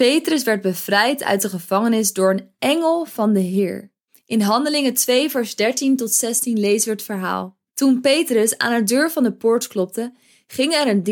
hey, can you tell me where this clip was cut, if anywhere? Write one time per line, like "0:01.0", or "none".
0:04.1
0:07.7